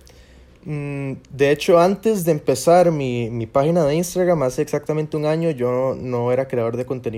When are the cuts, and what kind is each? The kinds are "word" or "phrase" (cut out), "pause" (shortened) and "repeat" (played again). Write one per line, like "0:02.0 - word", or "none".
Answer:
none